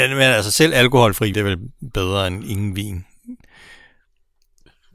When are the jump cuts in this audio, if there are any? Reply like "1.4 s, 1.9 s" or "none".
1.3 s